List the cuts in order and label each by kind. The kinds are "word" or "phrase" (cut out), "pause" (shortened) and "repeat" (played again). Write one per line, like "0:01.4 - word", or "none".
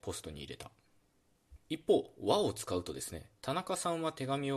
0:01.6 - pause
0:03.4 - pause